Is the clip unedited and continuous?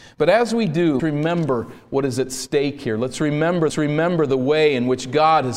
no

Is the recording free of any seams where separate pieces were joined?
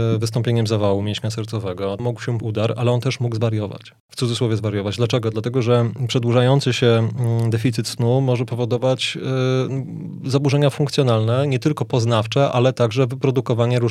no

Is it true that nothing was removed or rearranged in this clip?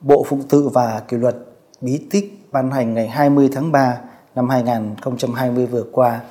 yes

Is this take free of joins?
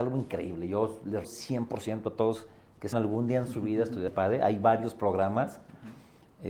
no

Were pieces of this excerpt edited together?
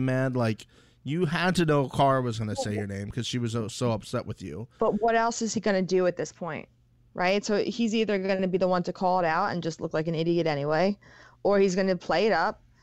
no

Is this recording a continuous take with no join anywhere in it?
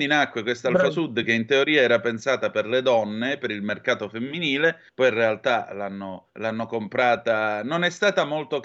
no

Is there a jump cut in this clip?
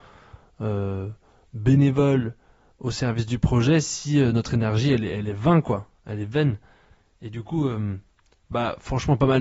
no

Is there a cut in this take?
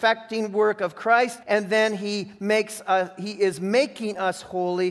yes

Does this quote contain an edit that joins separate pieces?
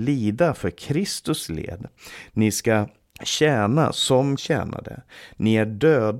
yes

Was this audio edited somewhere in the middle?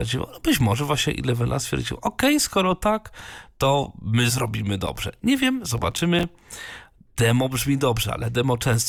no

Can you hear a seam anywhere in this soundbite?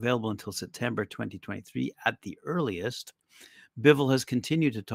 no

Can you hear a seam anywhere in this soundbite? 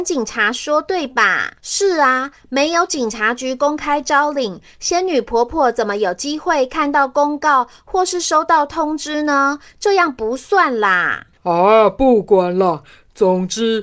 yes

